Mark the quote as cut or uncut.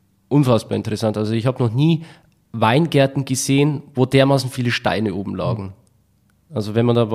uncut